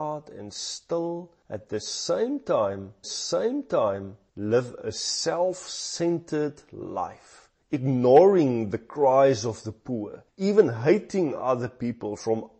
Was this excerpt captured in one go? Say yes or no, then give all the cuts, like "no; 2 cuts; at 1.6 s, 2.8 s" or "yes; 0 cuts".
no; 1 cut; at 3.0 s